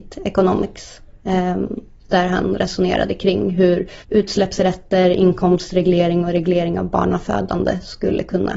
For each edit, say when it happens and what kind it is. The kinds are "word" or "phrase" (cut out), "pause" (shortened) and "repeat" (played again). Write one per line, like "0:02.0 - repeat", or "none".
0:04.0 - pause

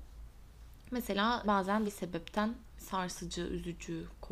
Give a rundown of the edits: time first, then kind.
0:01.4 - word
0:01.8 - word
0:02.8 - word

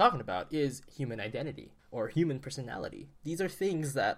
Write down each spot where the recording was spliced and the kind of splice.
0:01.8 - pause

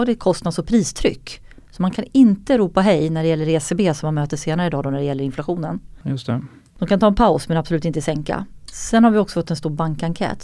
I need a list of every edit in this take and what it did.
none

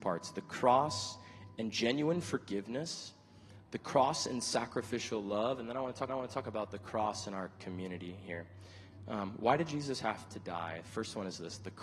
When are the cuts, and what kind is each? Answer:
0:06.1 - repeat

